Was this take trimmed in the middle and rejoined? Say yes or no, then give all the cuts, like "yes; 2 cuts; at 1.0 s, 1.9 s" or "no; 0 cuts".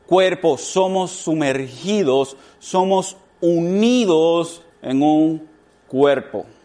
yes; 1 cut; at 4.7 s